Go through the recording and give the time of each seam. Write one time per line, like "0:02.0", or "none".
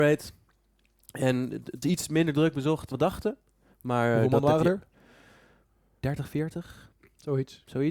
0:01.8
0:02.9